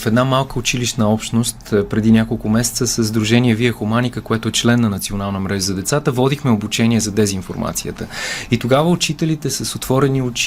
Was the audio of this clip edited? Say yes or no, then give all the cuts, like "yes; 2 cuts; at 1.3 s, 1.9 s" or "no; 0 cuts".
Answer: no; 0 cuts